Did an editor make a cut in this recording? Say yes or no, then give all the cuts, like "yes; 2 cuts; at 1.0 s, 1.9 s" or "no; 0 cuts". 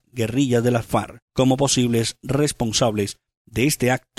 yes; 1 cut; at 1.2 s